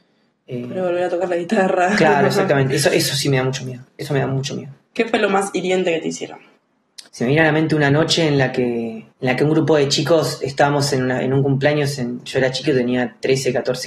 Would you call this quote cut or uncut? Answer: cut